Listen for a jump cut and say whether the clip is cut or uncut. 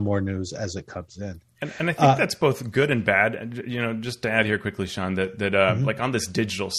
uncut